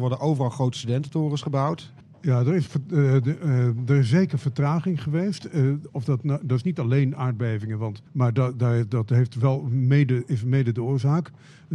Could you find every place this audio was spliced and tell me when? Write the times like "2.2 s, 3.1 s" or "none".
2.0 s, 8.1 s

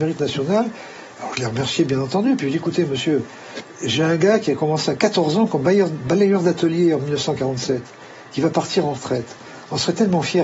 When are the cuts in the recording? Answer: none

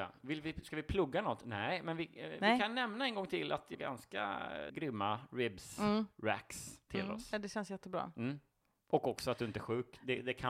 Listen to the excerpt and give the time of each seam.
3.7 s, 4.7 s

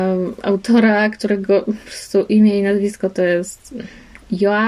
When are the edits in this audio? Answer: none

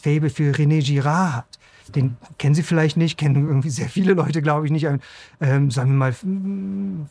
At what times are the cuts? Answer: none

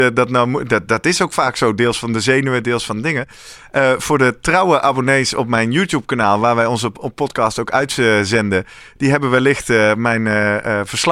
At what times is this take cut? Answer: none

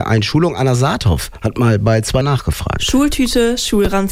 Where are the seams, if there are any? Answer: 2.2 s

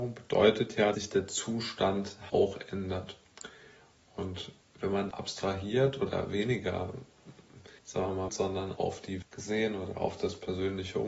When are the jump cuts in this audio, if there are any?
0.9 s, 2.3 s, 4.6 s, 5.1 s, 7.8 s, 8.3 s, 8.8 s, 9.2 s

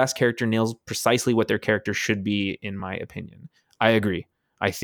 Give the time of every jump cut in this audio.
none

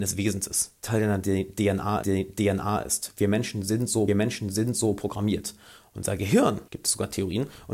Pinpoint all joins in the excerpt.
2.0 s, 4.1 s, 6.7 s

